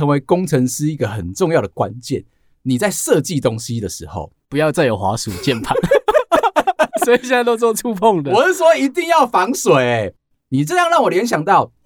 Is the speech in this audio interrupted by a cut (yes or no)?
no